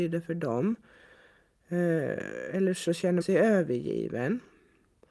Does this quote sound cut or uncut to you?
cut